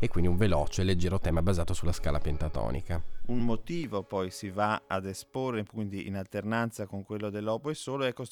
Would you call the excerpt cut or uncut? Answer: uncut